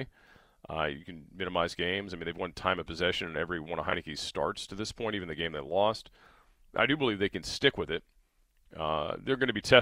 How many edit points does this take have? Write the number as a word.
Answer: zero